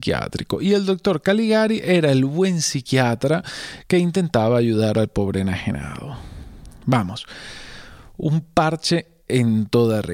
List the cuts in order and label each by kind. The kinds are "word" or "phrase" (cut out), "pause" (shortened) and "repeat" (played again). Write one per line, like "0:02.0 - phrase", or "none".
none